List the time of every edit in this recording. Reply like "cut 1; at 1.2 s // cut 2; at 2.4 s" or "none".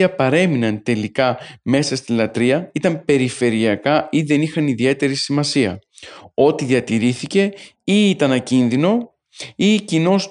none